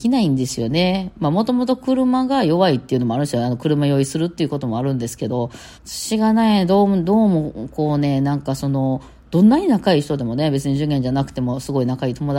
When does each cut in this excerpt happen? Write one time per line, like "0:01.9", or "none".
0:05.7